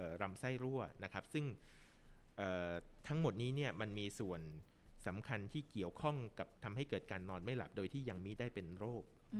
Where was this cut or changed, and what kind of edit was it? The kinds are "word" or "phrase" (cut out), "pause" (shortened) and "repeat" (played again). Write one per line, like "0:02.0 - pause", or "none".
0:06.6 - pause